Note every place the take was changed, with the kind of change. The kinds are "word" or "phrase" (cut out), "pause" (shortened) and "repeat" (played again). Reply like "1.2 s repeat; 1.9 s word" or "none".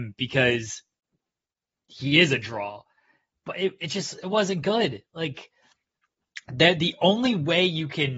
none